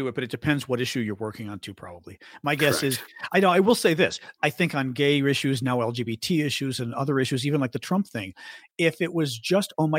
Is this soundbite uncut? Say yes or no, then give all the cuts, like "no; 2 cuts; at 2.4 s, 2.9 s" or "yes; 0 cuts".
yes; 0 cuts